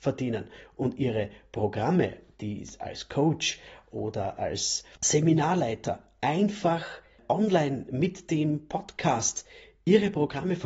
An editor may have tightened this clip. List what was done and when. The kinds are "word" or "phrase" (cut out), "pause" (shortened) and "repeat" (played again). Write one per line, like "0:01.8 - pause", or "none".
none